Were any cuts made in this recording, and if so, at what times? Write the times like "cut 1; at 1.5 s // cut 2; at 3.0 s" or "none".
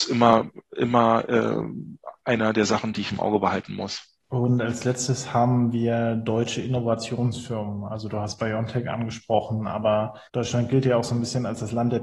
cut 1; at 4.2 s // cut 2; at 10.3 s